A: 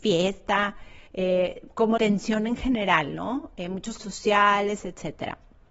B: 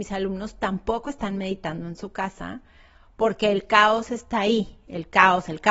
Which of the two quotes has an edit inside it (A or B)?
A